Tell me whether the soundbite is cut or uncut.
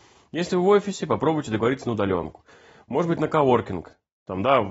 uncut